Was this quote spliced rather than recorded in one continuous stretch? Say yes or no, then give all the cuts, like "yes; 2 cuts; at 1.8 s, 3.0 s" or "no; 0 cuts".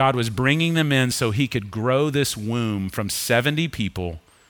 no; 0 cuts